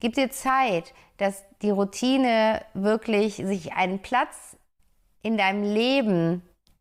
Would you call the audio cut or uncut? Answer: uncut